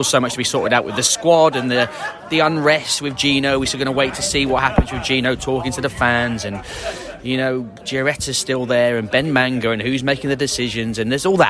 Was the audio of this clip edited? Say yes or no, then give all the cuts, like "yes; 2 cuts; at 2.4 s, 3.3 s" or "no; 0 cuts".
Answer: no; 0 cuts